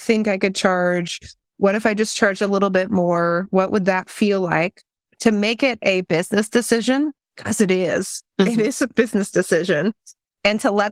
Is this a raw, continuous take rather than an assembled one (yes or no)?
yes